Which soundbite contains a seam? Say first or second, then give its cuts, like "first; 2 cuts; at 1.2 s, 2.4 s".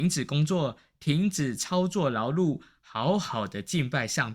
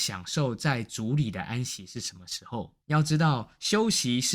second; 1 cut; at 2.8 s